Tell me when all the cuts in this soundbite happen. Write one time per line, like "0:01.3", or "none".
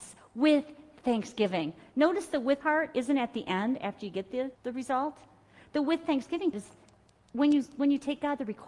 0:02.6
0:04.5
0:06.5